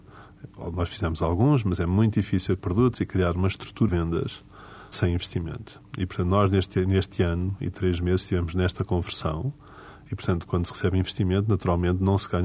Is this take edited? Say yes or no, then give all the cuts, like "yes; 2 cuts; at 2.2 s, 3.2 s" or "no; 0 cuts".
yes; 4 cuts; at 2.6 s, 3.9 s, 4.9 s, 10.5 s